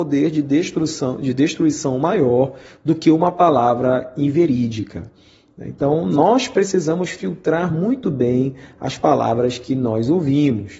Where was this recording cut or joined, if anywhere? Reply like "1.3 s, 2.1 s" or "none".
none